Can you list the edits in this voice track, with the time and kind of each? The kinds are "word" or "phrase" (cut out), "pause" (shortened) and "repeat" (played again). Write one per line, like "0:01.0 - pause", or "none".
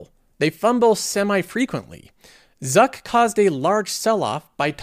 none